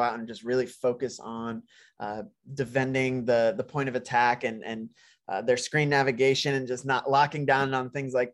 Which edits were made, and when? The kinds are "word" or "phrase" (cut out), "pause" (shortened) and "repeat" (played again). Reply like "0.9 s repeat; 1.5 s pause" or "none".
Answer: none

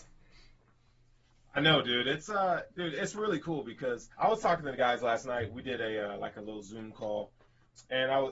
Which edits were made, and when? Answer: 4.1 s pause

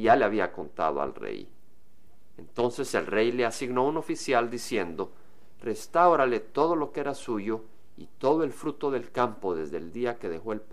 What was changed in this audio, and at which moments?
none

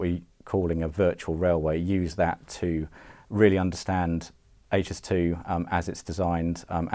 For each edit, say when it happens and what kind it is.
none

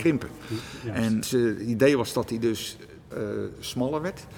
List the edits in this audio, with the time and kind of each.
1.2 s word; 3.1 s word

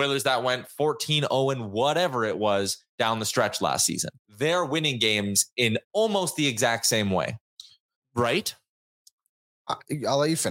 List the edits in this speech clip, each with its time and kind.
4.2 s pause; 5.8 s pause; 7.9 s pause

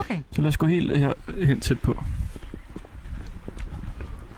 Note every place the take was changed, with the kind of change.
none

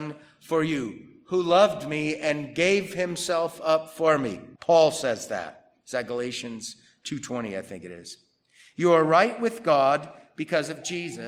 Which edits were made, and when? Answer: 4.6 s pause

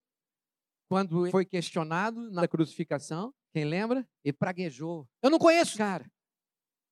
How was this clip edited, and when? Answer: 1.3 s word; 2.4 s word; 3.4 s pause; 4.2 s pause; 5.1 s pause; 5.7 s word

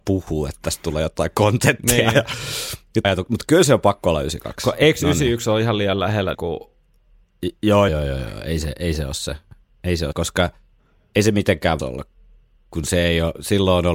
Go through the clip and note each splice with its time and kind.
3.0 s word; 6.3 s word; 7.9 s word; 10.1 s word; 11.8 s word

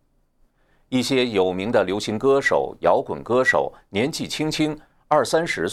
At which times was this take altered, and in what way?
none

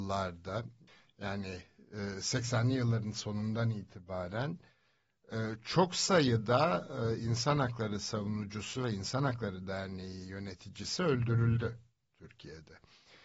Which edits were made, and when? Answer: none

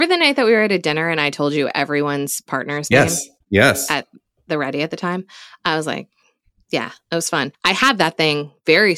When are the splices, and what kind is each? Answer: 3.4 s pause; 7.5 s pause

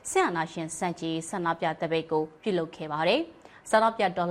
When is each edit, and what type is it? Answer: none

